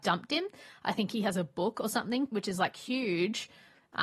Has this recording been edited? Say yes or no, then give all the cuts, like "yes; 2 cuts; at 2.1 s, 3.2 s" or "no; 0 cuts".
yes; 1 cut; at 2.3 s